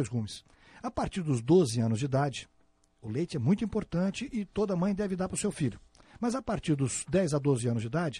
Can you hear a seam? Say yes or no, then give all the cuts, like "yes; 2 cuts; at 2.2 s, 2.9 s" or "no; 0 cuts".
no; 0 cuts